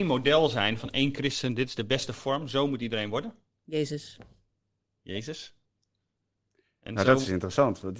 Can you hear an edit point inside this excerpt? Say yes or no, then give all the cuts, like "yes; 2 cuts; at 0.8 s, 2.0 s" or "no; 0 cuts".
no; 0 cuts